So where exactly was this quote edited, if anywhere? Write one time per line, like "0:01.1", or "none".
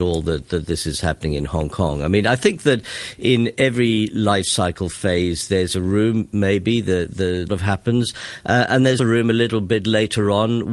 0:07.5
0:09.0